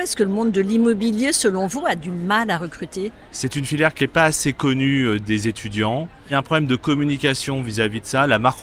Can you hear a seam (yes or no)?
no